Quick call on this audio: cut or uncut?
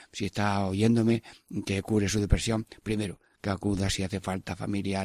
uncut